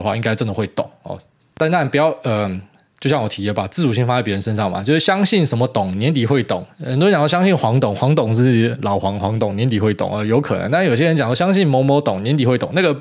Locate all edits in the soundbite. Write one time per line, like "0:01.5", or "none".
none